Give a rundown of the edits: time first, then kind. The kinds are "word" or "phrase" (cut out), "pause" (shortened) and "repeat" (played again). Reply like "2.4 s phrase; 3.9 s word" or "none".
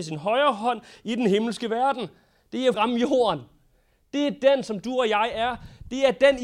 2.7 s phrase